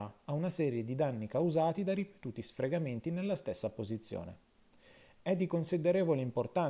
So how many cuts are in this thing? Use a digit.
0